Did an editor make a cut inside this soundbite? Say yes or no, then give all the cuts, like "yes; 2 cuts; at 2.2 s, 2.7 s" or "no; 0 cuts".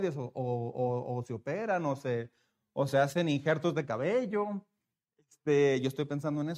no; 0 cuts